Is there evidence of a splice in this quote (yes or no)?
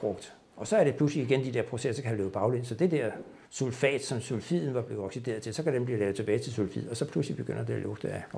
yes